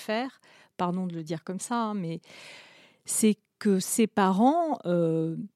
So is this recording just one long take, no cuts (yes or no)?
yes